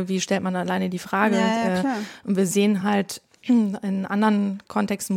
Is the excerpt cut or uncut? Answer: uncut